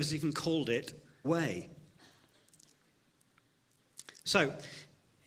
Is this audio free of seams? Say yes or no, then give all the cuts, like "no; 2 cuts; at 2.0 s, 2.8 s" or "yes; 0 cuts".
no; 1 cut; at 1.2 s